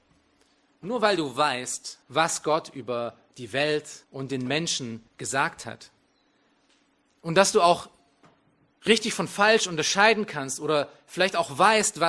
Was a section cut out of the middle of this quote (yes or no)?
yes